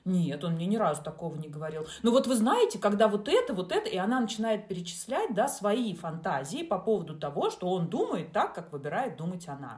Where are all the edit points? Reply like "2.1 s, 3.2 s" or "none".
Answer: none